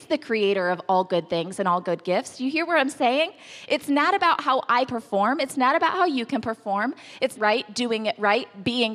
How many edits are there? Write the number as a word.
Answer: two